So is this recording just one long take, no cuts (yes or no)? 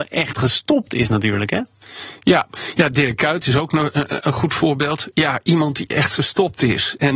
yes